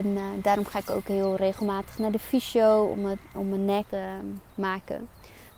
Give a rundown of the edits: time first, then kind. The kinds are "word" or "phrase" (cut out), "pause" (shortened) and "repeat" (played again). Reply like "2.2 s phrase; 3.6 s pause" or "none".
3.9 s phrase